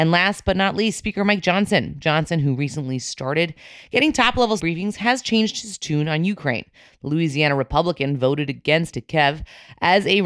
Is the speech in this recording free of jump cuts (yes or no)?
no